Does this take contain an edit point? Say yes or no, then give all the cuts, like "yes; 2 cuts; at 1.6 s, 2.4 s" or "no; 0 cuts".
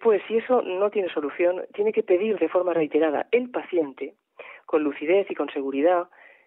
no; 0 cuts